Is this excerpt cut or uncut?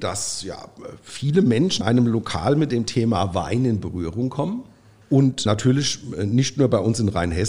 cut